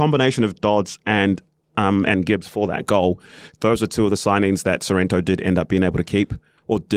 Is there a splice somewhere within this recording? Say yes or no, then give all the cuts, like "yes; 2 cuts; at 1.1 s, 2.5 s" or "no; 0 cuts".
yes; 1 cut; at 1.6 s